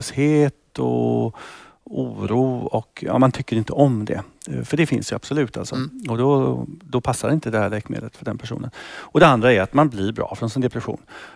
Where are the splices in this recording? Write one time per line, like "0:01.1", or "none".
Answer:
none